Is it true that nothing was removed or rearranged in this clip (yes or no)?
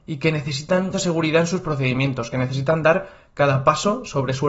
no